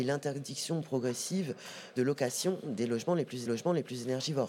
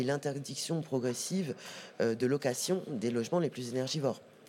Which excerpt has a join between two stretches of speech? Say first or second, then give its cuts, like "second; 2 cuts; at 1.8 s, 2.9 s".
first; 2 cuts; at 2.0 s, 3.5 s